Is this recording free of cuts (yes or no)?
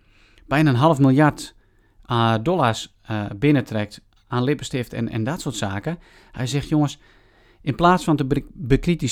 yes